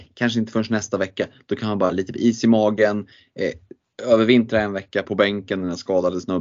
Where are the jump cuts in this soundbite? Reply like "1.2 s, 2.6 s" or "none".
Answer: 5.0 s

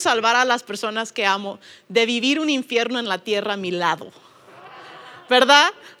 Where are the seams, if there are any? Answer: none

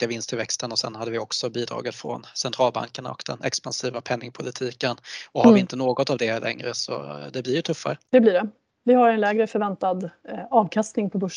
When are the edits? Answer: none

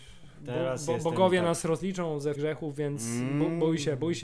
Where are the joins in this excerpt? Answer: 2.4 s

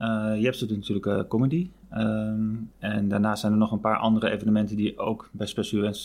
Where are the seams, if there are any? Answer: 2.7 s

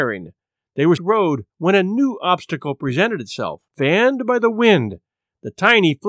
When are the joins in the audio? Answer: 1.0 s, 1.5 s, 3.7 s

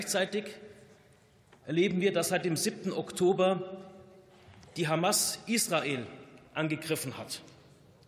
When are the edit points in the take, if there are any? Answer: none

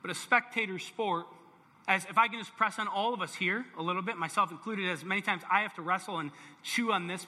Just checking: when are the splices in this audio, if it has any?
1.6 s

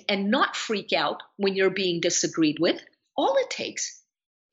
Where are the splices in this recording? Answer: none

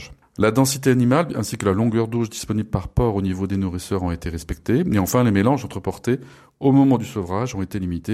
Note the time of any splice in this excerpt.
none

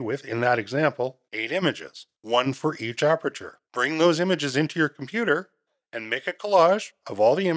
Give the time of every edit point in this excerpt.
1.3 s, 2.1 s, 3.7 s

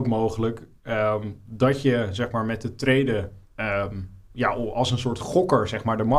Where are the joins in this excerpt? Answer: 3.5 s

